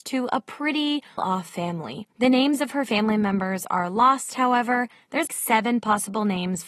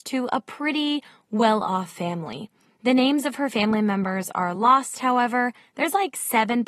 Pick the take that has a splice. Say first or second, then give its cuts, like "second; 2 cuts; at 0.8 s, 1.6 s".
first; 3 cuts; at 1.2 s, 2.1 s, 5.3 s